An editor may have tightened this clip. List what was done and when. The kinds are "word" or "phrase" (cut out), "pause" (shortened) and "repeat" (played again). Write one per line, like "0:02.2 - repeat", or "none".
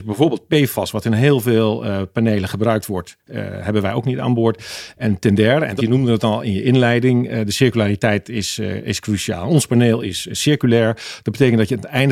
0:05.8 - phrase